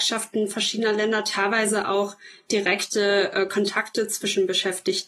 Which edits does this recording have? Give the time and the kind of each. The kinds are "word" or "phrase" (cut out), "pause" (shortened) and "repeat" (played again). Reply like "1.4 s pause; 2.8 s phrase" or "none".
none